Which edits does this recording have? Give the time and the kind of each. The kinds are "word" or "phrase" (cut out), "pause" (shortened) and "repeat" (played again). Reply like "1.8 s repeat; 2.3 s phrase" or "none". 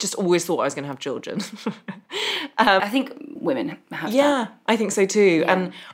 2.8 s word; 3.4 s word